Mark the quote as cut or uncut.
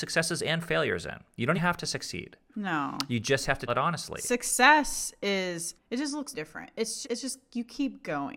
cut